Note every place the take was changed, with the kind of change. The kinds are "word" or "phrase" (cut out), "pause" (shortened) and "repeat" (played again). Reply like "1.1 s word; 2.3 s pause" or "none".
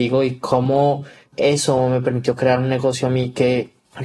none